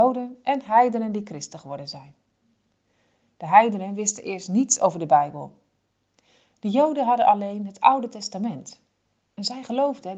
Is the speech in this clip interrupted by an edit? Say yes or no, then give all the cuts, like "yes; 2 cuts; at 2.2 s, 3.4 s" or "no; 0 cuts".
no; 0 cuts